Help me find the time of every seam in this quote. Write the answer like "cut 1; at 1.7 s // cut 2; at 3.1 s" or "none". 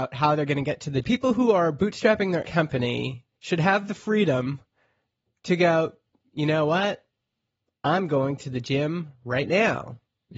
cut 1; at 1.0 s // cut 2; at 2.4 s // cut 3; at 3.3 s